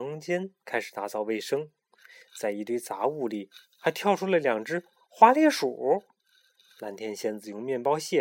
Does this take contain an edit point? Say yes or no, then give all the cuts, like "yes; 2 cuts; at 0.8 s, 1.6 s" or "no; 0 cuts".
no; 0 cuts